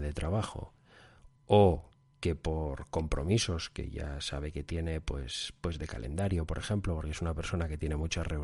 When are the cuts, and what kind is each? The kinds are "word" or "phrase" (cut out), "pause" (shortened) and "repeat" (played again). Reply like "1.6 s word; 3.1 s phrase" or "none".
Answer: none